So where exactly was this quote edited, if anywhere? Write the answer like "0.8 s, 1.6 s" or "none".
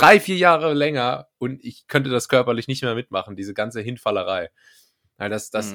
none